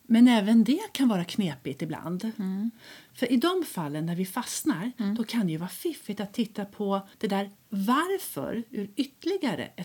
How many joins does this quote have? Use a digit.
1